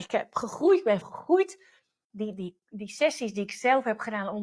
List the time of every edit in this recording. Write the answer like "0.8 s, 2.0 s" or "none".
1.0 s